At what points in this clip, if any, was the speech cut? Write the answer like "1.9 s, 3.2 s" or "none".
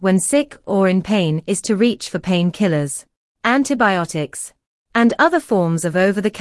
none